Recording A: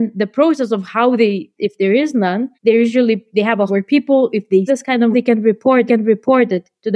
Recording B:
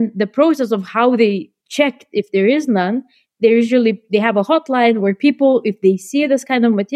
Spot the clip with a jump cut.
A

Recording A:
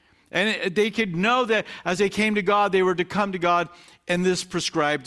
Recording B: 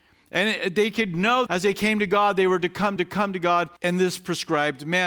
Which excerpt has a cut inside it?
B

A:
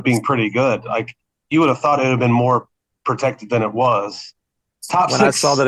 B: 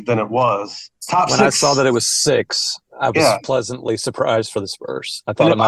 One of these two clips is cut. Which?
B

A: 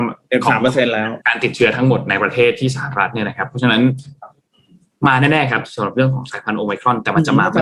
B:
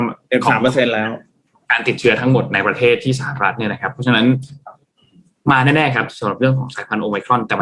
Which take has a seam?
A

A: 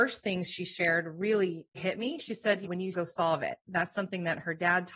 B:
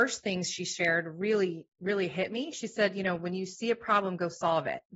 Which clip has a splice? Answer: A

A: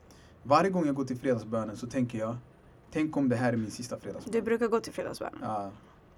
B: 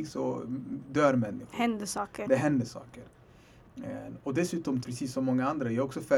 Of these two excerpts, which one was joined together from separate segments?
B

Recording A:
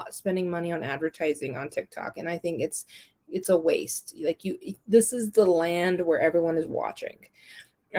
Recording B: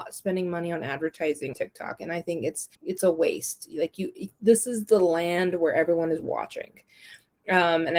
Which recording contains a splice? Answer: B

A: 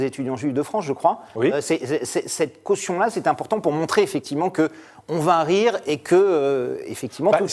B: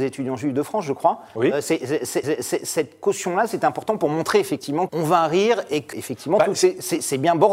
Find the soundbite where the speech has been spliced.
B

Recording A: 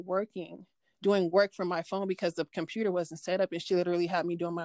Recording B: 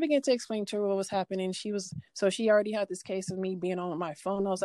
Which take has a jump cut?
B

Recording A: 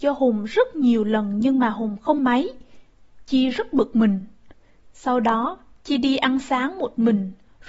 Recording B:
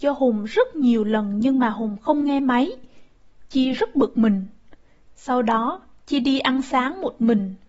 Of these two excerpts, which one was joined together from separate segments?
A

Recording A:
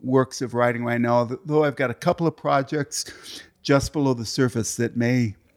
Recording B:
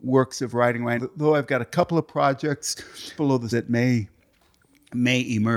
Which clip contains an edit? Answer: B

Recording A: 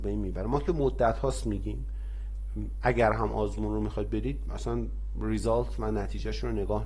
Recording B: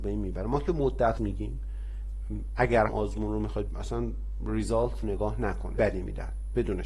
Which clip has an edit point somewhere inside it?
B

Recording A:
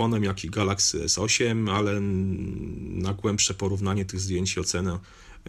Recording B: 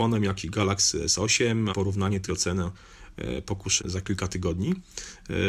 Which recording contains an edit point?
B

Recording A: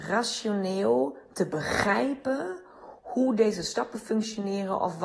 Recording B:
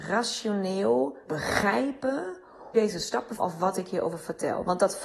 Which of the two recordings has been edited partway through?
B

